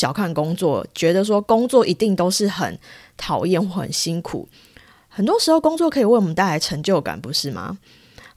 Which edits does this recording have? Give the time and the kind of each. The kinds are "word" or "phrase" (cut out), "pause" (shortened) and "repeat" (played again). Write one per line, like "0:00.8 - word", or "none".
none